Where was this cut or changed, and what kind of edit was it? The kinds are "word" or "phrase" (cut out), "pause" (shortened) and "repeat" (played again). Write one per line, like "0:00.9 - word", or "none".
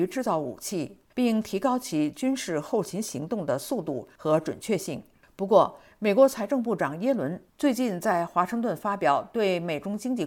0:01.1 - phrase